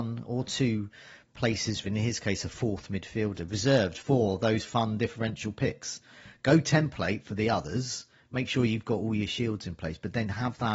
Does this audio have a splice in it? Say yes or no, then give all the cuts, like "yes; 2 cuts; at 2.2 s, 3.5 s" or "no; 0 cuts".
yes; 1 cut; at 1.8 s